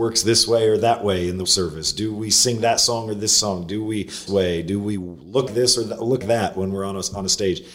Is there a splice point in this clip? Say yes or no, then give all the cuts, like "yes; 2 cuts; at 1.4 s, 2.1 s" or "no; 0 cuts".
yes; 4 cuts; at 1.4 s, 4.3 s, 5.5 s, 6.2 s